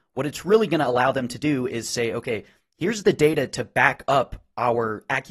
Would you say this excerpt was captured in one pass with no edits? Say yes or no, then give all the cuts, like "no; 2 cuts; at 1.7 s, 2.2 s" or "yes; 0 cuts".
yes; 0 cuts